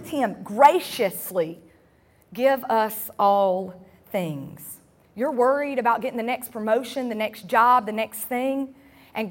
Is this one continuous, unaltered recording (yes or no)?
yes